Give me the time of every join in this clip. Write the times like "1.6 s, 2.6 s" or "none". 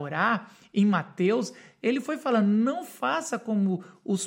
none